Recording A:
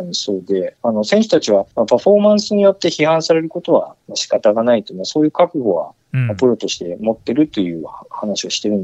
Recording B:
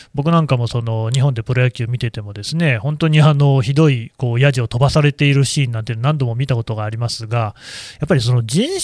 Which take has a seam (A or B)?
A